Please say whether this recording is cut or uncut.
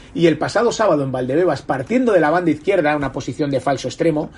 uncut